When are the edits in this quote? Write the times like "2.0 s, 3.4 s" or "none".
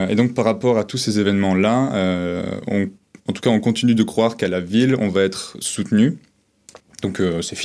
none